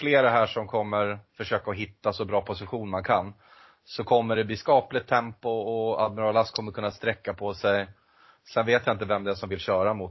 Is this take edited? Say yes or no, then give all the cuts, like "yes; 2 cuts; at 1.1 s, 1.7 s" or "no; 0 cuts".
no; 0 cuts